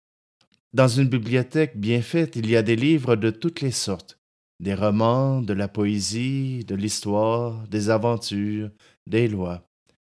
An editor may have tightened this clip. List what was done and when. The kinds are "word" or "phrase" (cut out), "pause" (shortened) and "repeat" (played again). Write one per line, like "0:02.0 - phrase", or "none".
none